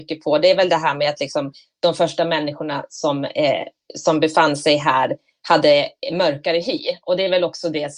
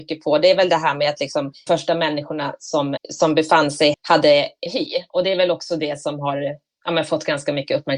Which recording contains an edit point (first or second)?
second